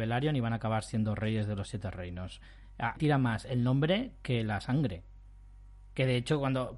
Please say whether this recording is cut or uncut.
cut